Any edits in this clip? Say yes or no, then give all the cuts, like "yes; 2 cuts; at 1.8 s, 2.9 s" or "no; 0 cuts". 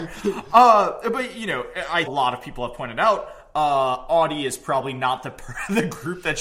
yes; 1 cut; at 2.1 s